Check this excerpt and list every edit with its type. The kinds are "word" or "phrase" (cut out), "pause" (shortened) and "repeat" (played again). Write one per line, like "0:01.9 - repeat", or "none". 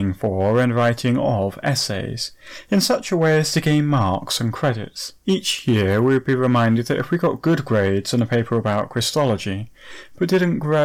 0:05.2 - pause

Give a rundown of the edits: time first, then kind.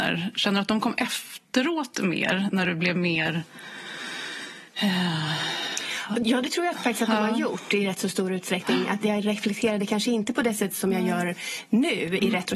0:04.7 - pause

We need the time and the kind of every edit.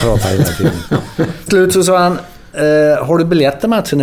0:01.5 - word

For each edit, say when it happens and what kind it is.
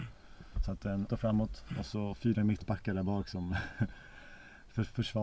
0:01.1 - phrase

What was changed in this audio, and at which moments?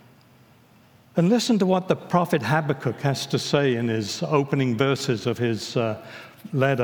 none

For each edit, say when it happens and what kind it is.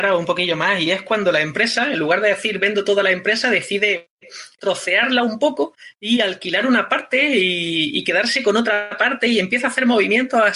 0:04.6 - word

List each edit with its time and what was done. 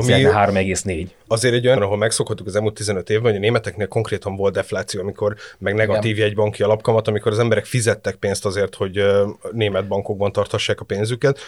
0:01.8 - word

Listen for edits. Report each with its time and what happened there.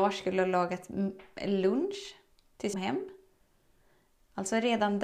0:02.7 - phrase

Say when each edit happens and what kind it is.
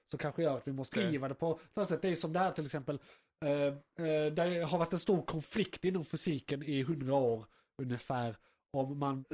0:00.9 - word

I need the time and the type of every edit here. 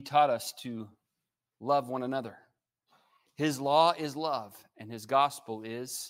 none

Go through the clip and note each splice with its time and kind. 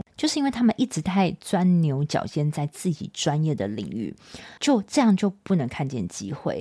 0:04.6 - pause

